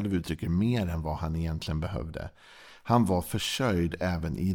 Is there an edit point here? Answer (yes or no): no